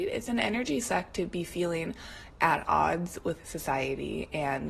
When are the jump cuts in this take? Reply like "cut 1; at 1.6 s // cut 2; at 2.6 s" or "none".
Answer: none